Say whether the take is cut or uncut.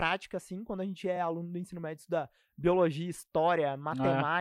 uncut